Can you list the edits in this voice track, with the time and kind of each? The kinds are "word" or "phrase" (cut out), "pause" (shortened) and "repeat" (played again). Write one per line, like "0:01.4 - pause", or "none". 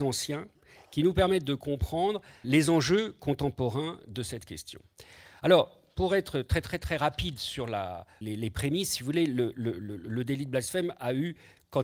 0:02.4 - word
0:08.2 - word